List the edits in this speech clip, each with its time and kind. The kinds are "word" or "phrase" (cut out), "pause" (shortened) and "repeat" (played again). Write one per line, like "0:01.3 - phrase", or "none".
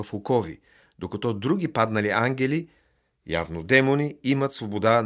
none